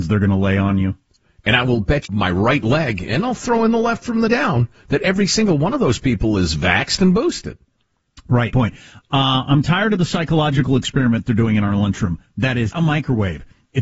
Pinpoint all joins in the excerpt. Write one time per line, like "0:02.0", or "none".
0:02.0
0:04.3
0:08.5
0:12.7